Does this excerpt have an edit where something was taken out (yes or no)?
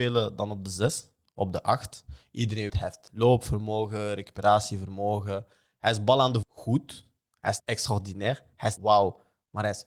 yes